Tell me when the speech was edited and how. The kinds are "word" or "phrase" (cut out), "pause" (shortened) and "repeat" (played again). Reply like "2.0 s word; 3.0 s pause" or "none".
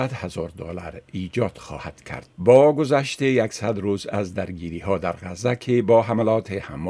2.3 s pause